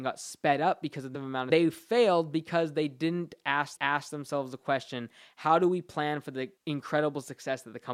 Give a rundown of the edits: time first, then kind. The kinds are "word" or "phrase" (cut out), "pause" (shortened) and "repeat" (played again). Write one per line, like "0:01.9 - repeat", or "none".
0:01.1 - word
0:01.5 - phrase
0:03.8 - repeat
0:06.6 - pause

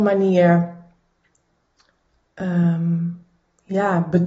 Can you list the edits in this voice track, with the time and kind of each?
none

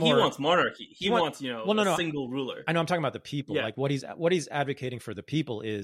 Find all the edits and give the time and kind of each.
none

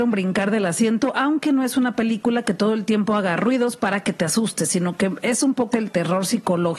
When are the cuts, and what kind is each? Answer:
0:05.7 - word

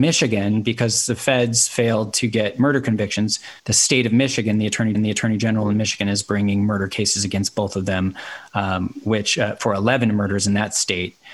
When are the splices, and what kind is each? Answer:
0:03.6 - pause
0:04.9 - repeat

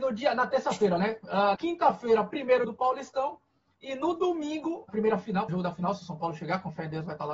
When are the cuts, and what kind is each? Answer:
0:01.5 - word
0:02.6 - word
0:04.9 - word
0:05.5 - word

